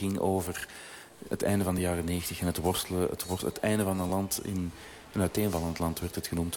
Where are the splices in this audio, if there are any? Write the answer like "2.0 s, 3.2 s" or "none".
none